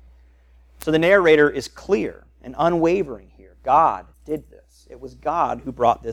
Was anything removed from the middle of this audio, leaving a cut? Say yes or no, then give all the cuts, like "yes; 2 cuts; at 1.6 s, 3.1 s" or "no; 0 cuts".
yes; 1 cut; at 4.1 s